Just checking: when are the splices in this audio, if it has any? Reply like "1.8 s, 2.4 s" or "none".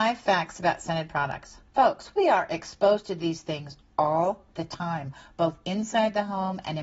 1.7 s